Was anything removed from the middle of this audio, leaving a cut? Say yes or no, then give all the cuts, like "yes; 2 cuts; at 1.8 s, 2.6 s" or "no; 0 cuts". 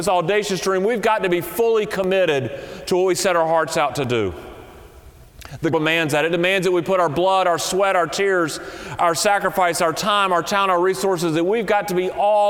yes; 1 cut; at 5.7 s